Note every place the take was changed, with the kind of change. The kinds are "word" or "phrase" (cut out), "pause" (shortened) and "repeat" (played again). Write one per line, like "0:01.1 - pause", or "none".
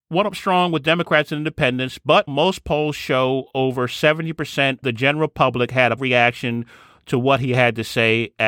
0:02.3 - word
0:04.8 - word
0:06.0 - word